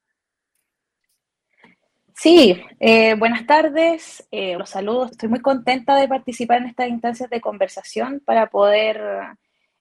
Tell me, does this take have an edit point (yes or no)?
yes